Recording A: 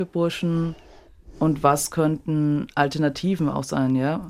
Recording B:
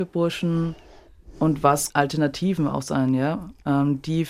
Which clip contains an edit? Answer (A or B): B